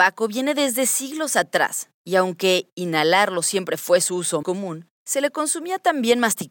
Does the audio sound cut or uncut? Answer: cut